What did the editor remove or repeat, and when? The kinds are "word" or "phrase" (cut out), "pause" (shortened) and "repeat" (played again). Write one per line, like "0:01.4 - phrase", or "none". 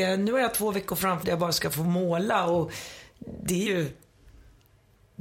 0:01.2 - word
0:03.7 - word